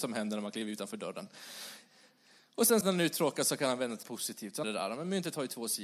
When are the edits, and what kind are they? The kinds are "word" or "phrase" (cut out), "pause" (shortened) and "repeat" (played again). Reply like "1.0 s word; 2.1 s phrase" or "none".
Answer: 2.8 s word; 4.0 s word; 4.6 s word